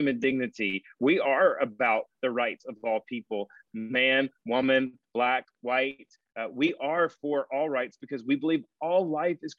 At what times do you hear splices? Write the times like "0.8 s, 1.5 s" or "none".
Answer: none